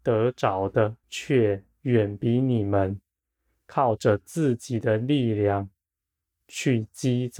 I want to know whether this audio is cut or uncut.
cut